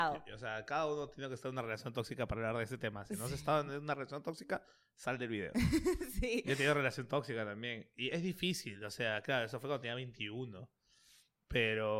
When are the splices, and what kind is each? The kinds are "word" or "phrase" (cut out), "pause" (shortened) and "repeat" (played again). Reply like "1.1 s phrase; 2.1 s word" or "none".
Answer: none